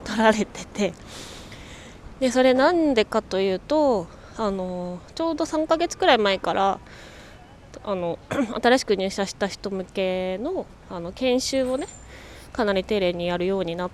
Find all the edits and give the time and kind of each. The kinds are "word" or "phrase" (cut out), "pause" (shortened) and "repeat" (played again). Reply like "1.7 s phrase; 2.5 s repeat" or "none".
5.1 s pause; 10.7 s pause